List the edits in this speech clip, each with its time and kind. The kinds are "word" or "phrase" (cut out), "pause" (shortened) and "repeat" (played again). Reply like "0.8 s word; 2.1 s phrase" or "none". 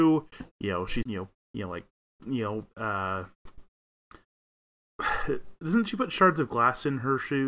1.0 s word; 1.4 s word; 2.2 s word; 2.7 s word